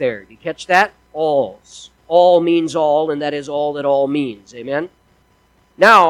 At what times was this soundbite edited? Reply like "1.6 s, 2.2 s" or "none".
2.0 s

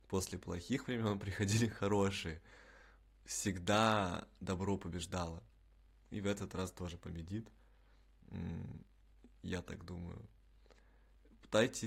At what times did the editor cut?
none

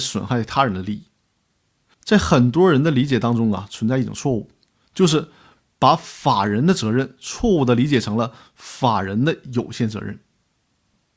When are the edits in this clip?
none

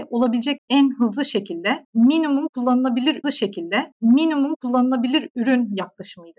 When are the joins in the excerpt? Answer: 3.2 s

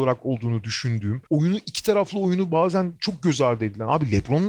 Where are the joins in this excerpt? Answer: 1.3 s

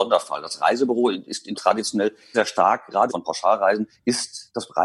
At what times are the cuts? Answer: 1.5 s, 2.3 s, 3.1 s

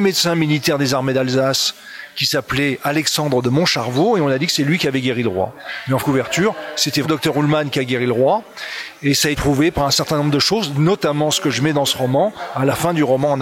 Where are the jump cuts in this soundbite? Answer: 6.0 s, 7.0 s, 9.3 s

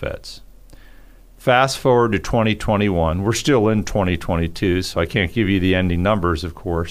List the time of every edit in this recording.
none

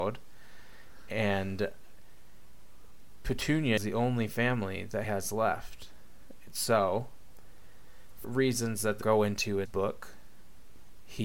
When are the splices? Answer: 3.8 s, 5.0 s, 8.2 s, 9.0 s, 9.7 s

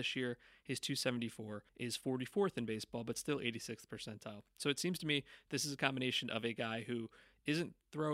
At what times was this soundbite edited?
1.7 s

